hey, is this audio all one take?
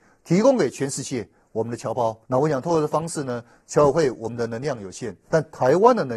no; 1 cut; at 2.2 s

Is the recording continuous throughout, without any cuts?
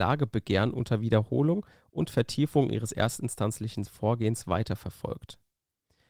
yes; 0 cuts

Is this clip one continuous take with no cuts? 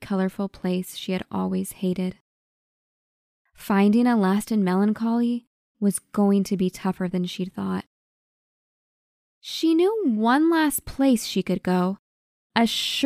yes; 0 cuts

